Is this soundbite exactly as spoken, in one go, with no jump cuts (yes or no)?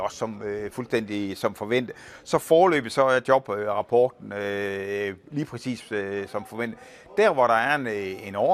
yes